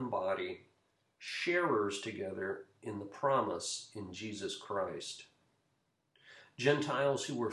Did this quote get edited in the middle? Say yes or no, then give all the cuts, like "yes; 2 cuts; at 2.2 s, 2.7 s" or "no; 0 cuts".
no; 0 cuts